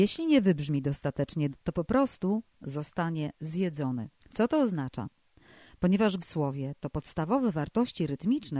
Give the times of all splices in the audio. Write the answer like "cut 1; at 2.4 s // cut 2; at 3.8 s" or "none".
cut 1; at 1.5 s // cut 2; at 4.2 s // cut 3; at 6.2 s